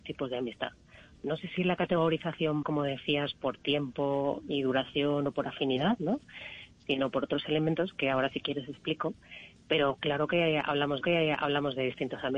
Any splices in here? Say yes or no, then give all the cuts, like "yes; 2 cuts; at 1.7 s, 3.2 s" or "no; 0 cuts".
yes; 2 cuts; at 2.6 s, 11.0 s